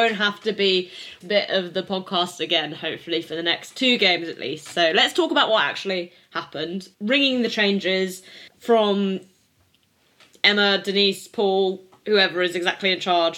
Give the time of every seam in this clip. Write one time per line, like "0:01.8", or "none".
0:01.2
0:06.9
0:08.5